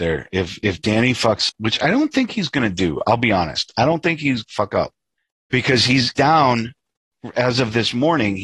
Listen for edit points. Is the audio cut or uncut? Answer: cut